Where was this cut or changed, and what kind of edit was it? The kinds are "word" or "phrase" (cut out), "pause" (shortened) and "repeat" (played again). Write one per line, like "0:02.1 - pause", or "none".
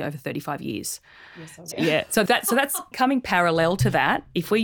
0:01.7 - word
0:02.3 - word
0:02.9 - word